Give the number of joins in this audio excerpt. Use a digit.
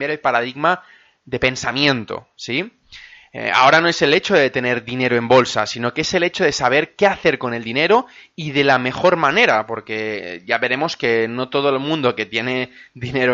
0